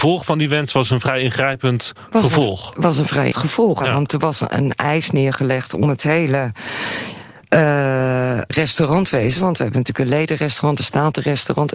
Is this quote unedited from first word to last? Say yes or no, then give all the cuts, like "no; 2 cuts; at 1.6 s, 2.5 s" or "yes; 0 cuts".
no; 4 cuts; at 3.3 s, 3.8 s, 4.5 s, 8.5 s